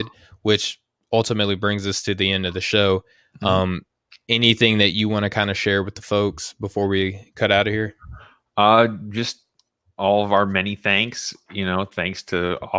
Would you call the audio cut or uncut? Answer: uncut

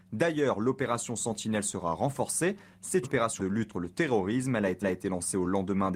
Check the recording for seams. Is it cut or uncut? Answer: cut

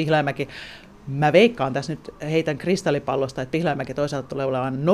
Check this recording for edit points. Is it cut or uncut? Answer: uncut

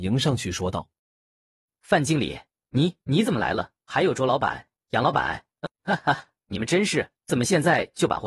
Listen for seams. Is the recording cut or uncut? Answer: cut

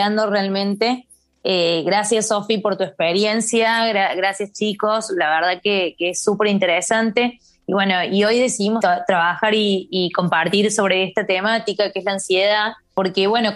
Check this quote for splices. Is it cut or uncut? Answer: uncut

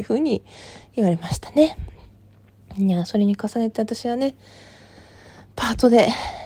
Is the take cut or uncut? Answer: uncut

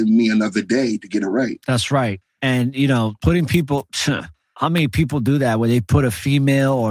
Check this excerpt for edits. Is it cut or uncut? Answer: uncut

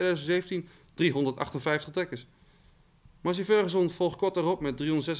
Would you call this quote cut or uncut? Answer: uncut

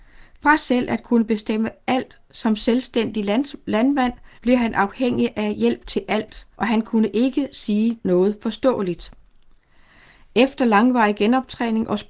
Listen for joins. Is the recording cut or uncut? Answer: cut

